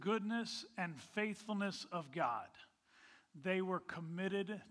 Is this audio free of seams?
yes; 0 cuts

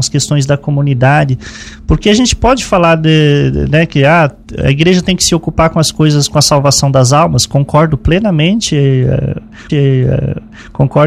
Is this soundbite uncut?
no; 1 cut; at 9.7 s

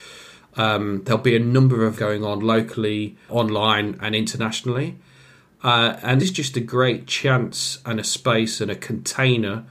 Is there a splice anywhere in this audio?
yes; 3 cuts; at 1.9 s, 3.3 s, 6.2 s

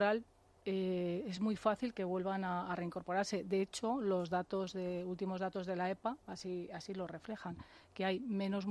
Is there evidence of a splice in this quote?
no; 0 cuts

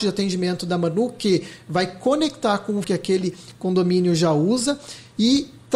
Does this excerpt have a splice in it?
yes; 1 cut; at 2.8 s

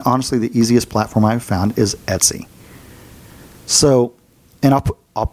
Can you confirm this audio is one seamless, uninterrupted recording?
yes; 0 cuts

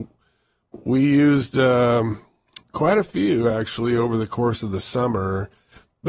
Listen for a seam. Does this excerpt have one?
no; 0 cuts

